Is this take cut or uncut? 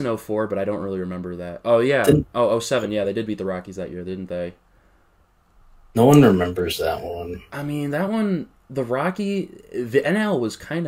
uncut